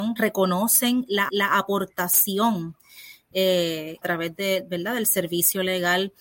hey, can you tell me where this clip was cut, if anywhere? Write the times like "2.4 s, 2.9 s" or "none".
1.3 s, 4.0 s